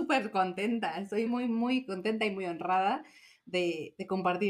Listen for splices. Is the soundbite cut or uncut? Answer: cut